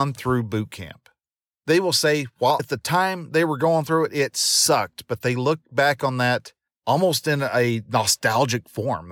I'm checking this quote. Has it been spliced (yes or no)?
yes